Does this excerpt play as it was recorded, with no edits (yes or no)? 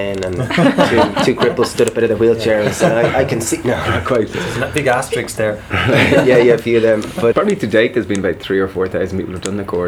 no